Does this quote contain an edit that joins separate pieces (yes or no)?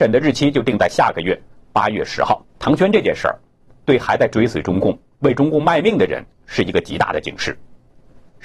yes